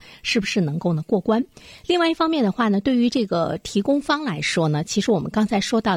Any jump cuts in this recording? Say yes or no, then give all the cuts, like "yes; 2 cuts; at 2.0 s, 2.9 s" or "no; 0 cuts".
no; 0 cuts